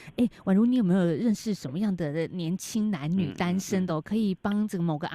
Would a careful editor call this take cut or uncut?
uncut